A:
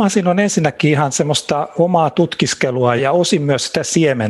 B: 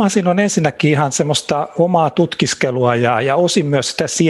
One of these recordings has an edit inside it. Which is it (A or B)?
A